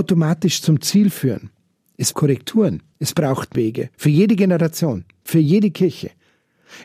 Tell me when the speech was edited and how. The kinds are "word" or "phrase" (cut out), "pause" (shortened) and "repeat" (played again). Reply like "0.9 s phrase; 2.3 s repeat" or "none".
2.1 s word; 2.9 s pause; 3.5 s word; 3.9 s pause